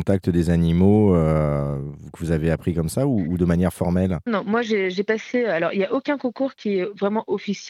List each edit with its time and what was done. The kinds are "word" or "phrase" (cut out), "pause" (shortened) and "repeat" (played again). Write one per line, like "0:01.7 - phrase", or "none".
0:04.3 - word